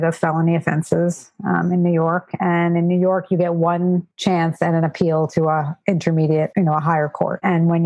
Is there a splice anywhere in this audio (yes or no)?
no